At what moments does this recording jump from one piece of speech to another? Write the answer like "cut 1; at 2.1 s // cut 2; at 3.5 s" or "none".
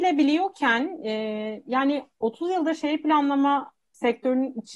none